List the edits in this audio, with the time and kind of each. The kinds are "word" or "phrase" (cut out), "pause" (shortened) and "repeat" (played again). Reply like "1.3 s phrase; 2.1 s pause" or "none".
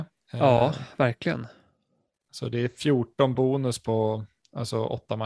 none